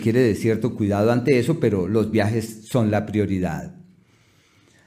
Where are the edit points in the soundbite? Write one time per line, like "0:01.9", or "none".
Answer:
none